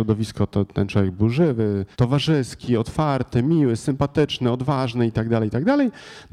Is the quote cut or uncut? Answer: cut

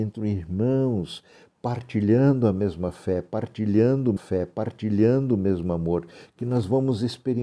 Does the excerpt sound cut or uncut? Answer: cut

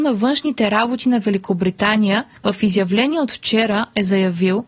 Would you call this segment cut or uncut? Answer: uncut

